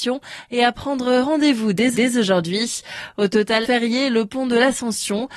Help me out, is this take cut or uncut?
cut